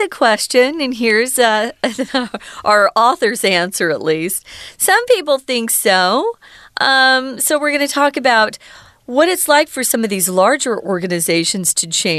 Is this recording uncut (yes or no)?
yes